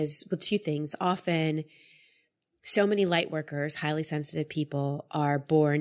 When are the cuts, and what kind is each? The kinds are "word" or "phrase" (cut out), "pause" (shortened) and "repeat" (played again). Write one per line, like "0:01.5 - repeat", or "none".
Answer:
none